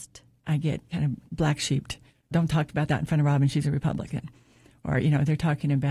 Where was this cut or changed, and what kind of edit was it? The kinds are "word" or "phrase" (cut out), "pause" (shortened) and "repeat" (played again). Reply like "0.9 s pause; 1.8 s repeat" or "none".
none